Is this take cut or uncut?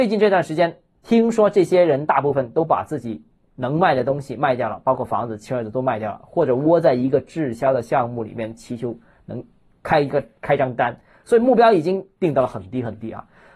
uncut